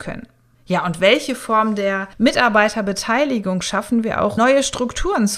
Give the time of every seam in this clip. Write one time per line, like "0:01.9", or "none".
0:02.1
0:04.4

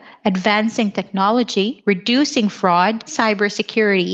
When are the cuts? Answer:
0:01.8
0:03.1

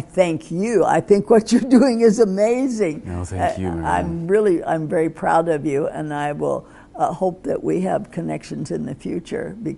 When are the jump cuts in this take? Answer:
none

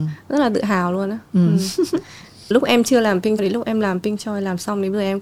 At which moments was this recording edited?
0:02.5
0:03.4

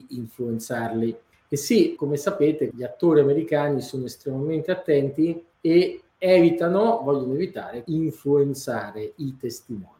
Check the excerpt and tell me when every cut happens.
0:01.3
0:02.0
0:02.7
0:05.5
0:07.8

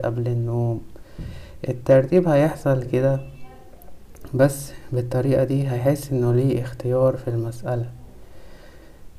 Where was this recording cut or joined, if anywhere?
0:02.9

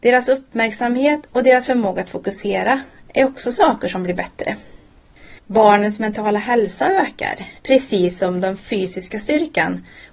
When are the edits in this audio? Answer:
0:05.4
0:07.6

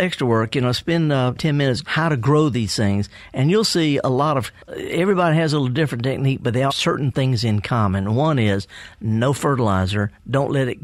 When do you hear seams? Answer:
0:01.4
0:01.8
0:04.6
0:06.7

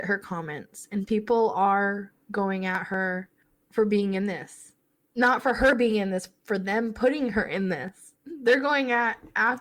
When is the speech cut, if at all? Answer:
none

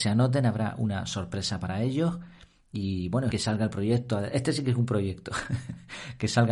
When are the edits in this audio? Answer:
0:03.3

